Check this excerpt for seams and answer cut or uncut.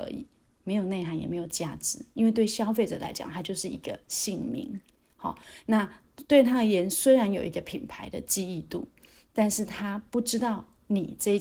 uncut